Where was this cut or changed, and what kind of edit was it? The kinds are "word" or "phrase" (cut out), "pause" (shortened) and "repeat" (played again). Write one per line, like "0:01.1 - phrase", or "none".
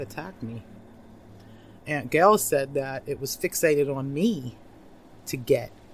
none